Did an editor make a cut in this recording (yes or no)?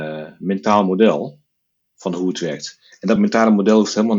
no